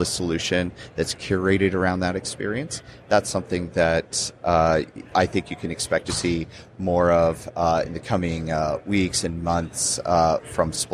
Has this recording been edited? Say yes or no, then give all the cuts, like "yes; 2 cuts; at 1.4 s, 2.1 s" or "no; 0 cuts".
no; 0 cuts